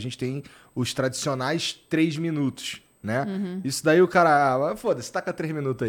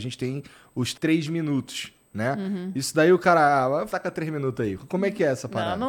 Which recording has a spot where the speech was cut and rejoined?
second; 2 cuts; at 0.9 s, 3.9 s

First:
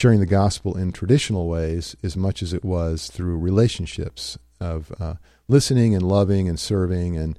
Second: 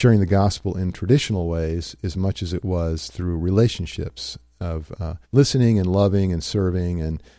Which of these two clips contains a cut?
second; 1 cut; at 5.2 s

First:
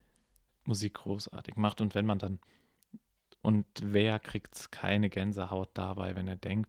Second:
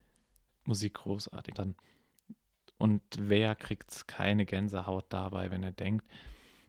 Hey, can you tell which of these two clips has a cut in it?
second; 1 cut; at 1.5 s

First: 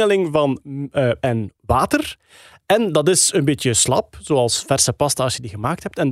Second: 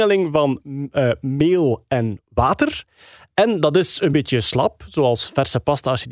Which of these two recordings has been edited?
first; 1 cut; at 1.2 s

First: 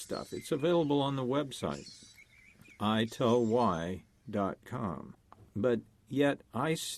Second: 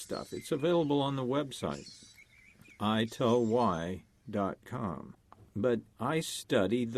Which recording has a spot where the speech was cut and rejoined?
second; 1 cut; at 5.9 s

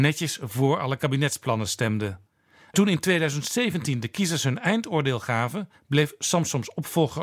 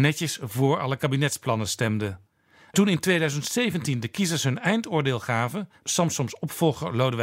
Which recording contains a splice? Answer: second; 1 cut; at 5.8 s

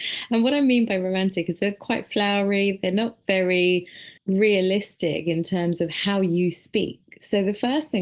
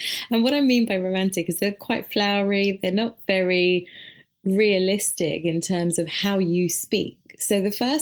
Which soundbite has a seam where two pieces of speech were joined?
first; 1 cut; at 4.2 s

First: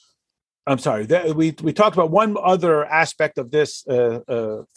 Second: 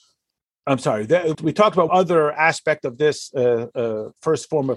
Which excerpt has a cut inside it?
second; 2 cuts; at 1.3 s, 1.9 s

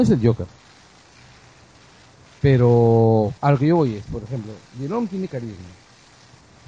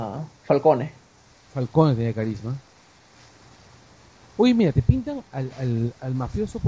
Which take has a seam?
first; 1 cut; at 3.4 s

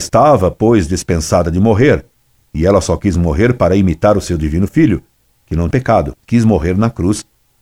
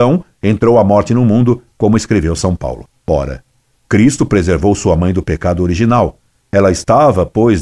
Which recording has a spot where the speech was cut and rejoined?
first; 2 cuts; at 5.7 s, 6.2 s

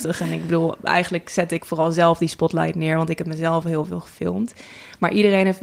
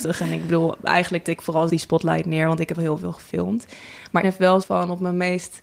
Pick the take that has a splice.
second; 5 cuts; at 1.2 s, 1.7 s, 2.7 s, 4.2 s, 4.6 s

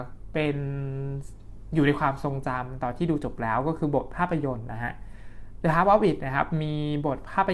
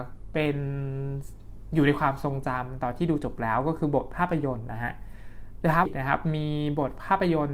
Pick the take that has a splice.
second; 1 cut; at 5.9 s

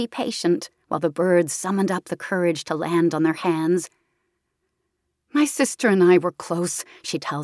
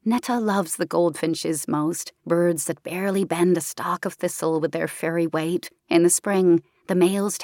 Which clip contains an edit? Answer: second; 2 cuts; at 2.2 s, 5.8 s

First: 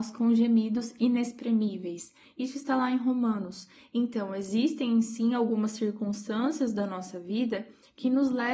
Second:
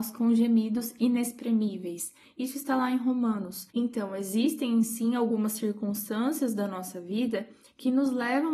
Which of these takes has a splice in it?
second; 1 cut; at 3.7 s

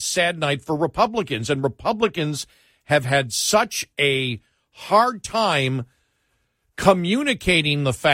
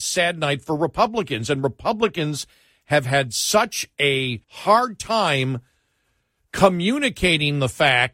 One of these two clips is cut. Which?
second; 1 cut; at 4.4 s

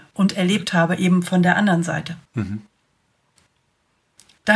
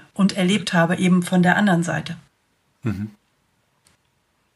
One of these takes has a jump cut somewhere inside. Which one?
first; 1 cut; at 2.3 s

